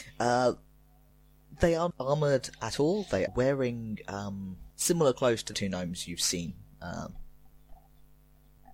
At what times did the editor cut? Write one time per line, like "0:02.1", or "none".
0:01.9
0:03.3
0:04.7
0:05.5